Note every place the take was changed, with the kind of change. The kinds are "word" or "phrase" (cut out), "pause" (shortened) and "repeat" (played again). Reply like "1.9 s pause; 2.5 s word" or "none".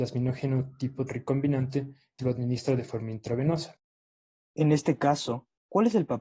1.1 s word; 2.2 s word; 4.0 s pause

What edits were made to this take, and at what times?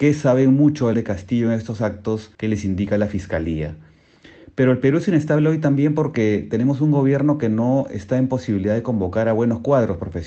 0.9 s phrase; 2.3 s pause

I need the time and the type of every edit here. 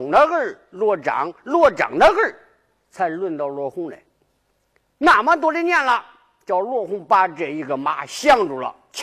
none

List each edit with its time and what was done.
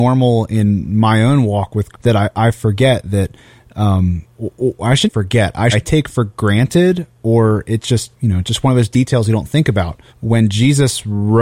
1.9 s word; 5.0 s phrase; 5.7 s phrase; 8.1 s pause; 10.1 s pause

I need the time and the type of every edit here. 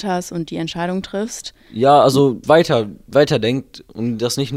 2.4 s phrase

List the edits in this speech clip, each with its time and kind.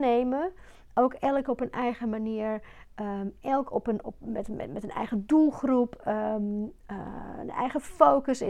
none

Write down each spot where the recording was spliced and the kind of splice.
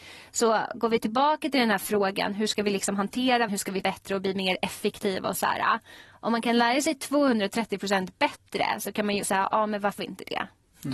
3.5 s word; 3.8 s word; 9.2 s word; 10.0 s word

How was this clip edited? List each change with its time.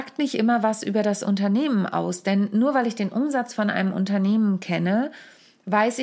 none

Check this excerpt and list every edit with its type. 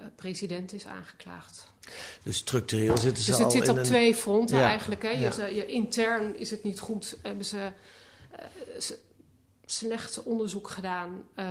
none

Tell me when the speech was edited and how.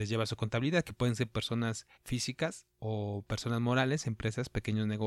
1.9 s pause

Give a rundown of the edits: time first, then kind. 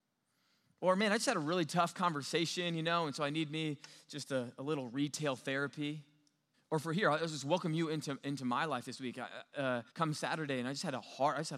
6.5 s pause; 9.9 s pause

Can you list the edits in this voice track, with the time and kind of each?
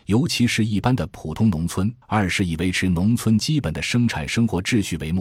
2.0 s pause

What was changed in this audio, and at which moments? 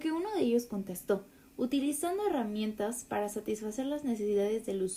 none

